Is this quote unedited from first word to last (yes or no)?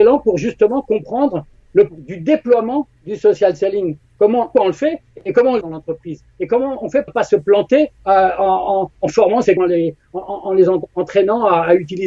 no